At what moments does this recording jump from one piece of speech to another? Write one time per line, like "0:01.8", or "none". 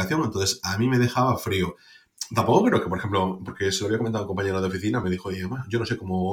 none